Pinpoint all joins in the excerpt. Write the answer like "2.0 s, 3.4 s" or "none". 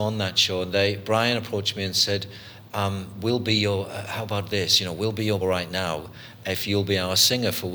5.4 s